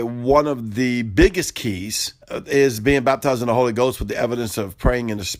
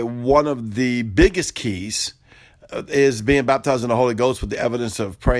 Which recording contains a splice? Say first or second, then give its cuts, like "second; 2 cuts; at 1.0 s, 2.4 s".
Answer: first; 1 cut; at 2.2 s